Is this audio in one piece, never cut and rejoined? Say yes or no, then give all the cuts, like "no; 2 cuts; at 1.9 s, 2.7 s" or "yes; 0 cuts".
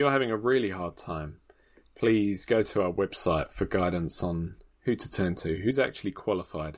yes; 0 cuts